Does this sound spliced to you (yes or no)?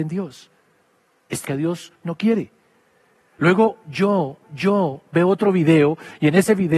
yes